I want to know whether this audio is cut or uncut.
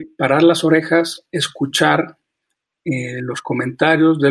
uncut